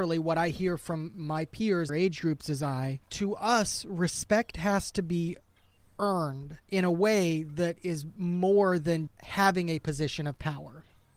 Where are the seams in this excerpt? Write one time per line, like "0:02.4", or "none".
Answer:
0:01.9
0:03.0
0:06.6
0:09.1